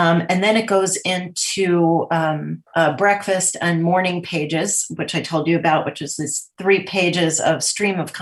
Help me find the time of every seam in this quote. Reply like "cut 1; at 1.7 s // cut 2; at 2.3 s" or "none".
cut 1; at 2.7 s